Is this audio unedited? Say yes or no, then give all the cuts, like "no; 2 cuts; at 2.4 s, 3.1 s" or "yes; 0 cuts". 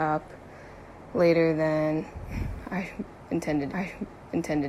no; 1 cut; at 3.7 s